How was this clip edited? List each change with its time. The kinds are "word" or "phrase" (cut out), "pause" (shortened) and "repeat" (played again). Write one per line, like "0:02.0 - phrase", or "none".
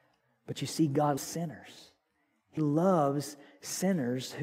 0:01.2 - word
0:02.6 - word

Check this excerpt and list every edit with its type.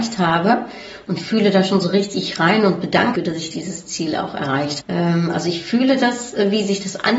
0:03.2 - phrase
0:04.8 - word

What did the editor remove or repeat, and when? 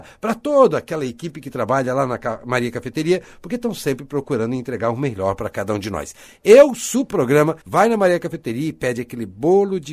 0:07.1 - phrase
0:07.6 - pause

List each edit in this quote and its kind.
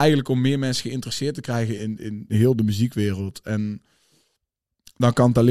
0:01.8 - word
0:02.3 - word

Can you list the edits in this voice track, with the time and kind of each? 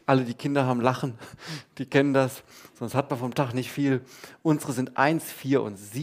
none

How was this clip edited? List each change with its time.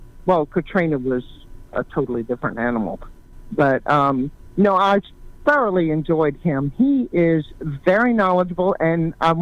none

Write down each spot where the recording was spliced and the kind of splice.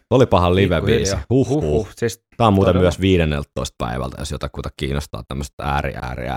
0:02.3 - pause

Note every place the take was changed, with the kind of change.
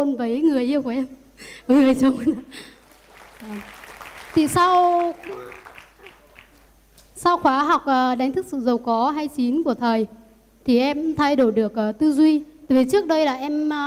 none

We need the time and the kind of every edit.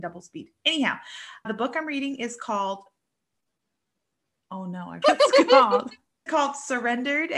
0:01.4 - word
0:05.0 - word
0:06.3 - word

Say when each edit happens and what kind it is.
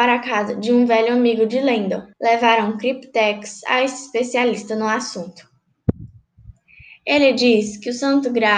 0:02.1 - pause

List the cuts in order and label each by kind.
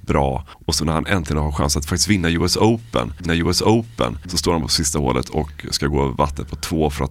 0:03.3 - repeat

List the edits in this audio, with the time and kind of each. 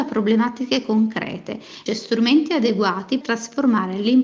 0:01.9 - phrase
0:03.2 - word

